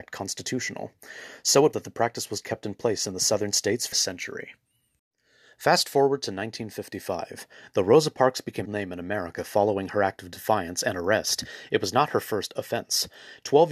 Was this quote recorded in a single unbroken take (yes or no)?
no